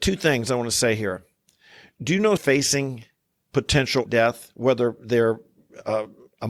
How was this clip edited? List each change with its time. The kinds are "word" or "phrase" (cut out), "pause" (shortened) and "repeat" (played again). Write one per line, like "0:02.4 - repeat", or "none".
0:02.4 - word
0:04.1 - word
0:05.0 - word